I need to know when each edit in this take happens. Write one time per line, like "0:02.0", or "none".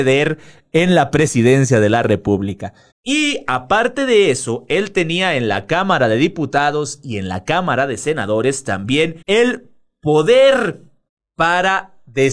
0:02.9
0:09.2
0:11.1